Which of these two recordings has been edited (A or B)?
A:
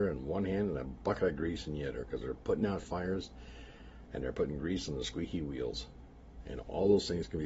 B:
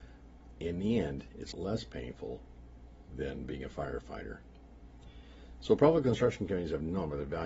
B